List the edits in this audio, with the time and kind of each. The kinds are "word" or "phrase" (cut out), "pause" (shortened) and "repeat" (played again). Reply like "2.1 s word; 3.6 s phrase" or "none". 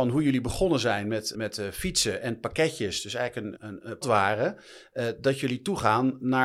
1.3 s word; 3.5 s word; 4.0 s phrase